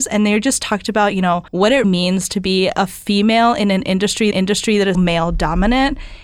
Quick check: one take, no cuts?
no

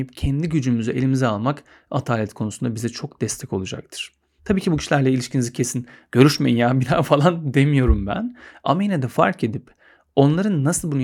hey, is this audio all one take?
yes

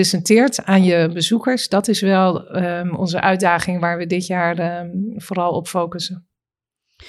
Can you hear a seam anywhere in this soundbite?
no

